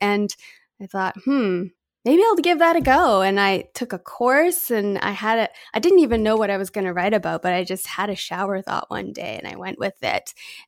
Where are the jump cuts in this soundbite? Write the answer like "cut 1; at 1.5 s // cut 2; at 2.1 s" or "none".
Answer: none